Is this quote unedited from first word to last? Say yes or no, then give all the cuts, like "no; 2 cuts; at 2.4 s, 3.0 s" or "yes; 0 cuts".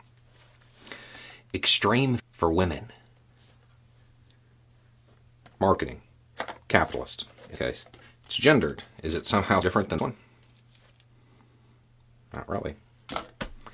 no; 5 cuts; at 2.2 s, 7.6 s, 8.0 s, 9.6 s, 10.0 s